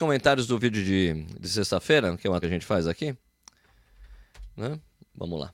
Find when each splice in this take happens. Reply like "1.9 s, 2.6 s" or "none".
2.4 s

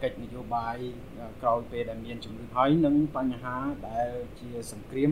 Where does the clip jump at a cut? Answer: 2.5 s

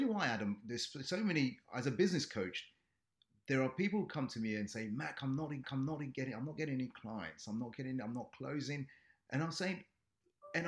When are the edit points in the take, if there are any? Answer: 5.6 s

